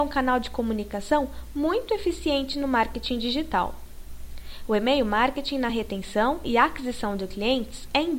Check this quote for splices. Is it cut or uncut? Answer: uncut